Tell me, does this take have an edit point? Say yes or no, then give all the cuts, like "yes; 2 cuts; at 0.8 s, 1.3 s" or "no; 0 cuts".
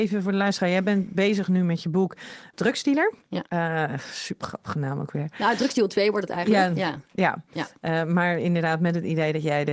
yes; 2 cuts; at 2.5 s, 3.5 s